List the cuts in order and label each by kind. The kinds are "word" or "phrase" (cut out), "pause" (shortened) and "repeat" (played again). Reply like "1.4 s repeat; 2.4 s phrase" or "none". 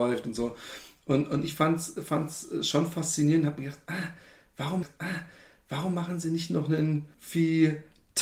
4.8 s repeat; 7.1 s pause

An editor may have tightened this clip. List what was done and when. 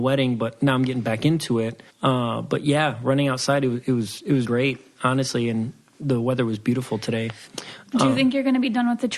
1.9 s pause; 4.4 s word

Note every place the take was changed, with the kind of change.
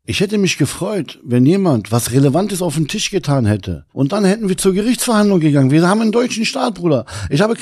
3.9 s pause

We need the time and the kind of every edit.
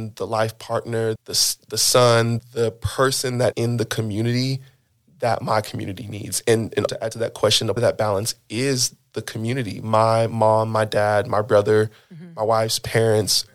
1.2 s word; 2.4 s word; 3.5 s word; 6.9 s word; 7.8 s word

